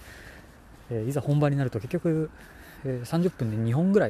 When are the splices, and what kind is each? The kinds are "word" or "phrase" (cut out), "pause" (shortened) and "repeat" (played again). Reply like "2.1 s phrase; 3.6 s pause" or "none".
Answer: none